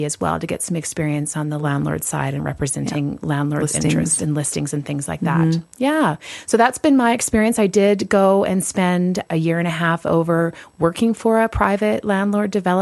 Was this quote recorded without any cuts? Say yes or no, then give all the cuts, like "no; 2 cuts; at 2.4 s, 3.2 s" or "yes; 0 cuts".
yes; 0 cuts